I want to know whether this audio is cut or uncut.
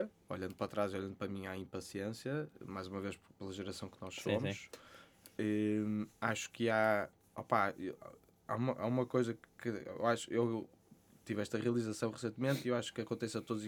uncut